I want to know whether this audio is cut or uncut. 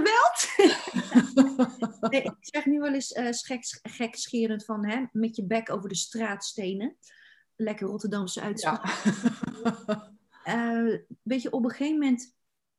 uncut